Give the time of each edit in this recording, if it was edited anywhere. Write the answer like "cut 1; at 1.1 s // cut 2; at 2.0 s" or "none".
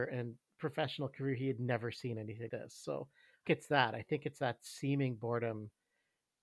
cut 1; at 2.5 s // cut 2; at 3.5 s